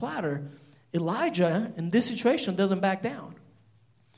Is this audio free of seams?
yes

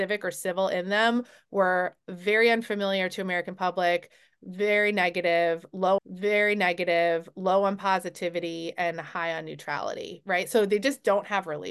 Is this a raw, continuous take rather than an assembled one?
no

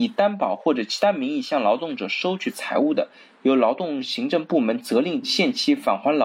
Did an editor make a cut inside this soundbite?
no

